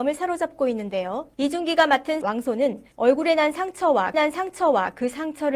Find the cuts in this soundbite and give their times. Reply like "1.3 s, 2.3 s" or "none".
1.3 s, 2.2 s, 2.9 s, 4.1 s